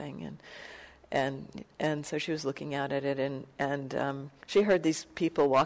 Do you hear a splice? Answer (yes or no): yes